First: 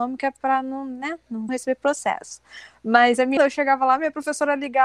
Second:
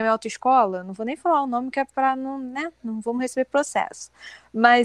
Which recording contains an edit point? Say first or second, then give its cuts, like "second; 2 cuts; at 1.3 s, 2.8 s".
first; 2 cuts; at 1.5 s, 3.4 s